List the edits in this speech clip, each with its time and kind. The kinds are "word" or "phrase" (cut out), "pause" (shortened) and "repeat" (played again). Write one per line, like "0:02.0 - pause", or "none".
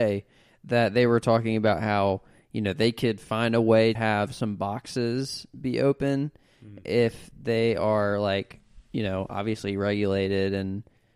0:04.0 - word